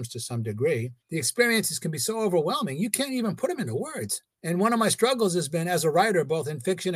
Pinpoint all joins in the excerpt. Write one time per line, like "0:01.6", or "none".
0:01.0
0:04.3